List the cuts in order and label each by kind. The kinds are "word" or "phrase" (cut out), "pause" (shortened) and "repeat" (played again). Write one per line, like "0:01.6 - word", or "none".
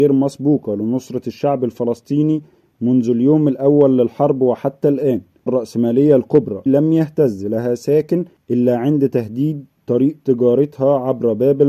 0:05.5 - word
0:06.7 - word